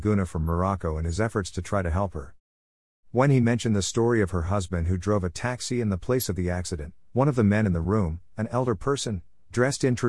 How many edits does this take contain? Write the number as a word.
zero